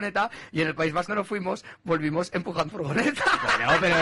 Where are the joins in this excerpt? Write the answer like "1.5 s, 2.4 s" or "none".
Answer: 1.1 s, 2.7 s